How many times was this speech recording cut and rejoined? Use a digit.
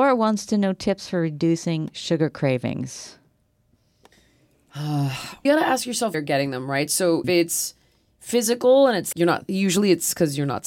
4